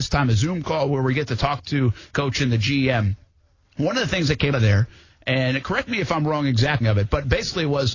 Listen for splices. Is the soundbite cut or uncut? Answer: cut